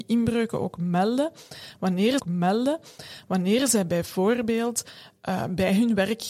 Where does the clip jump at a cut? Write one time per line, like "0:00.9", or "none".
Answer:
0:02.2